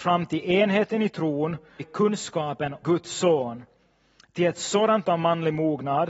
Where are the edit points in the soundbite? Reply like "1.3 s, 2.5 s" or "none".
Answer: 1.8 s, 2.8 s, 5.0 s